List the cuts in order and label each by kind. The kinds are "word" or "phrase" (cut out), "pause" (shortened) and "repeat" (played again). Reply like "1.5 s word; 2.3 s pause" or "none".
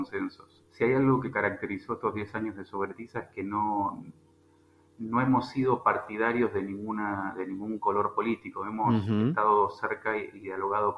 none